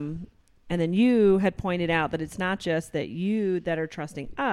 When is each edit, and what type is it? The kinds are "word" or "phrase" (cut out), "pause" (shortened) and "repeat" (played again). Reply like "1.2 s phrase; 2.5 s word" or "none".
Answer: none

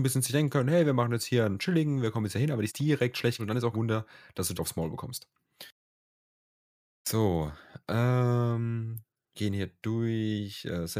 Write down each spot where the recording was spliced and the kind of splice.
2.7 s word; 3.4 s word; 3.7 s word; 4.6 s word; 9.3 s word

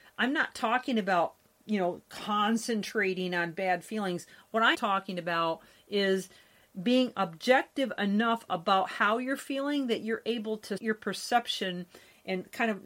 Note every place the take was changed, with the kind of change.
4.7 s word; 10.8 s word

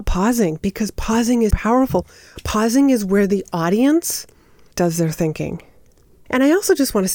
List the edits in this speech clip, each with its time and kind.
1.5 s word

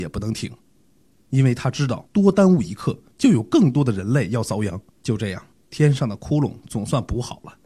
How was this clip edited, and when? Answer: 2.1 s pause; 3.1 s pause; 4.9 s pause; 5.5 s pause

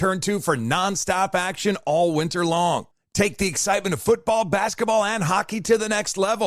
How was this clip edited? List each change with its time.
none

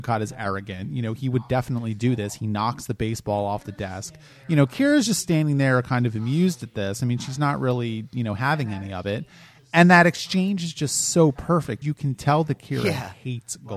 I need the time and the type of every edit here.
11.8 s word

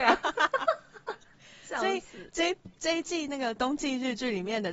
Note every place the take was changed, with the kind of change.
none

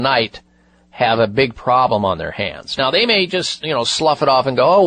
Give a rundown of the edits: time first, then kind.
none

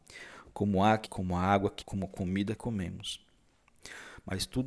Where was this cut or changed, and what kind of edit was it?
1.1 s word; 1.8 s word; 2.6 s word

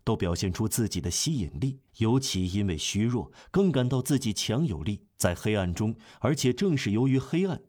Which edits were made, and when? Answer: 1.9 s pause; 5.1 s pause

